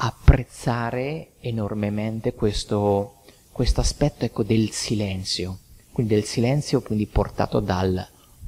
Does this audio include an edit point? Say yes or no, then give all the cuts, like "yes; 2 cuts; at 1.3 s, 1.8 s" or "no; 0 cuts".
no; 0 cuts